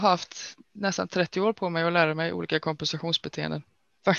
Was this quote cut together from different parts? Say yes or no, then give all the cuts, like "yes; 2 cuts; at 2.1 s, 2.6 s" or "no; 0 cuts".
no; 0 cuts